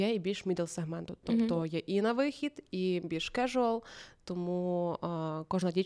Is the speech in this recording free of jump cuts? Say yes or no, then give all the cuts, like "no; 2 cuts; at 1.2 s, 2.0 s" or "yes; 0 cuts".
yes; 0 cuts